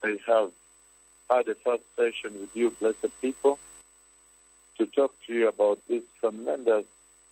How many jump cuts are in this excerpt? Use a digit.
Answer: 0